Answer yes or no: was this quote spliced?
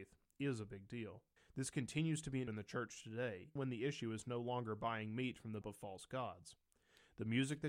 yes